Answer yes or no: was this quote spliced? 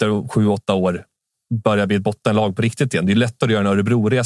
no